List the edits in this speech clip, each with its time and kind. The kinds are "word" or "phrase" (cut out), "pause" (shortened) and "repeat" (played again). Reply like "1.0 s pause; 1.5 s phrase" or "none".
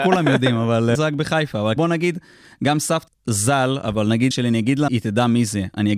0.9 s word; 1.8 s word; 3.1 s word; 4.3 s word; 4.9 s word

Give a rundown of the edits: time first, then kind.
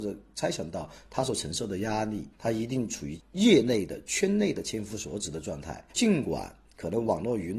2.3 s pause; 5.9 s pause

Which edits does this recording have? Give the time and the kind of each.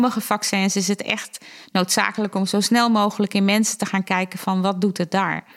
none

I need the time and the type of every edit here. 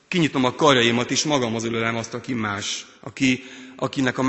2.9 s pause

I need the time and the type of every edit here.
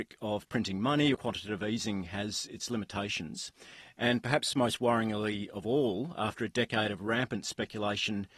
1.1 s phrase

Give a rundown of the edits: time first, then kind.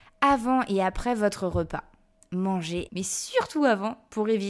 2.9 s word

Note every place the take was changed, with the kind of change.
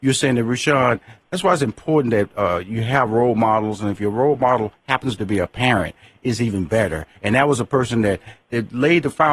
7.2 s pause

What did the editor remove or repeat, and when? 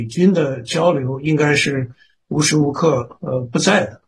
none

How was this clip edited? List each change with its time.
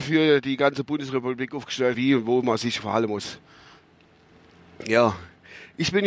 1.9 s word; 2.8 s word

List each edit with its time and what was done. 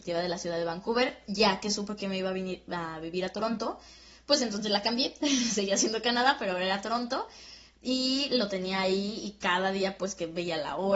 none

